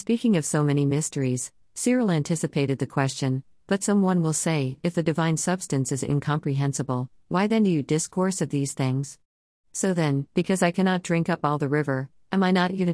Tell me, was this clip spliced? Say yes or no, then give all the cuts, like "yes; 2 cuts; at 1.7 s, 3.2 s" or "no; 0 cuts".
no; 0 cuts